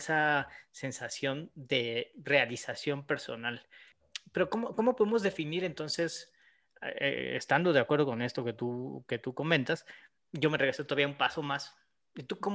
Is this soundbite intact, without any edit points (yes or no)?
yes